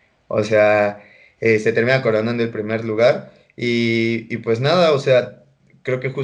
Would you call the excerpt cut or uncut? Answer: uncut